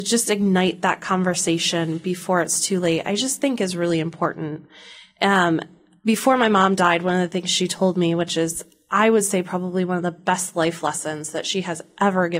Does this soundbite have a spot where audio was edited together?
no; 0 cuts

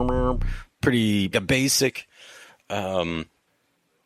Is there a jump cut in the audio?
yes; 1 cut; at 1.3 s

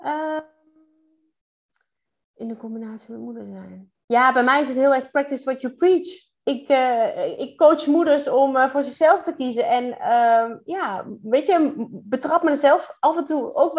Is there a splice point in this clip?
no; 0 cuts

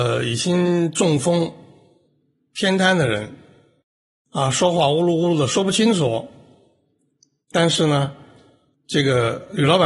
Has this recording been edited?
no; 0 cuts

